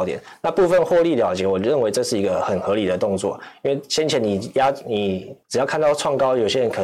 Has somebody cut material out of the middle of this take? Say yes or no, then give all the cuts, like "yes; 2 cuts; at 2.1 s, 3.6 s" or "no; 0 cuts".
yes; 1 cut; at 5.4 s